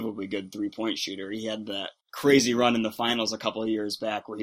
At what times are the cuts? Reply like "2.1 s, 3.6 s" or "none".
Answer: 2.0 s